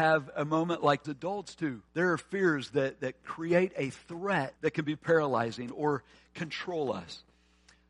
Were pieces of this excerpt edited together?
yes; 3 cuts; at 1.0 s, 1.9 s, 4.6 s

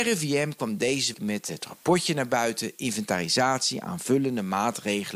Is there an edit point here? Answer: yes; 1 cut; at 1.1 s

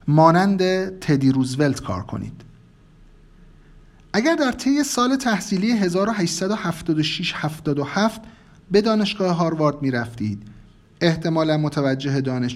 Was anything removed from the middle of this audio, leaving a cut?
no; 0 cuts

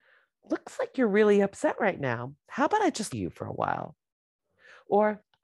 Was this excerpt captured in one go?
no; 1 cut; at 3.1 s

